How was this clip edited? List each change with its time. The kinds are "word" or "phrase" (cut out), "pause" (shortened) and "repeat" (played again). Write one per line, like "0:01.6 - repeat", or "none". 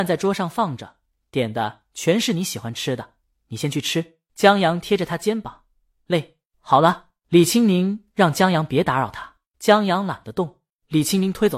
none